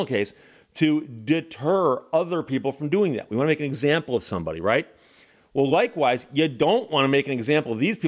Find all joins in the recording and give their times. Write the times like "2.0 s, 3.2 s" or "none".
none